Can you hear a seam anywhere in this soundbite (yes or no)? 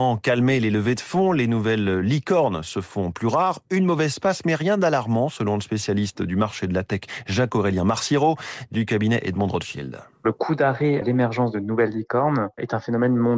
yes